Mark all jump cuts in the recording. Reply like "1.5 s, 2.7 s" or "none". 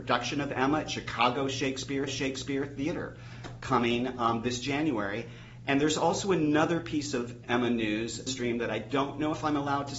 2.1 s, 8.3 s

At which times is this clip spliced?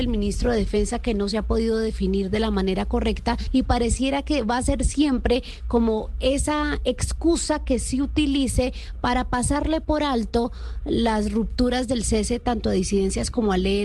none

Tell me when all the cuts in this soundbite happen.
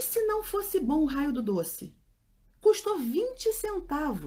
none

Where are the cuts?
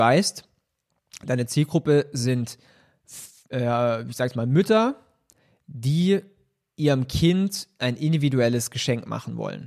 none

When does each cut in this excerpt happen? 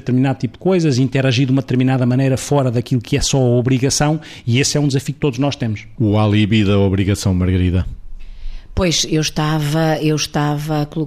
none

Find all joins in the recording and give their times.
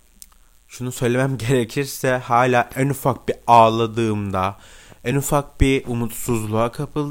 none

